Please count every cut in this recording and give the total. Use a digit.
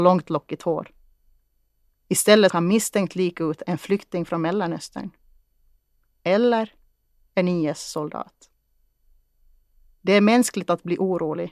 1